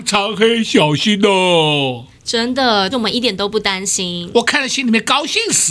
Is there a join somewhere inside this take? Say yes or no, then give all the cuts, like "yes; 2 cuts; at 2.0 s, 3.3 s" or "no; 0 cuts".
yes; 1 cut; at 2.9 s